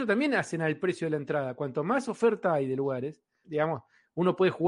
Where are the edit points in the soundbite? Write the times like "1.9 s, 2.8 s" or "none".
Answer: 3.4 s